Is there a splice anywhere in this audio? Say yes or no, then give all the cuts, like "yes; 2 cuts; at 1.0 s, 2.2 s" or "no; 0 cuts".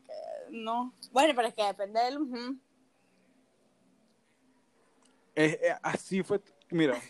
no; 0 cuts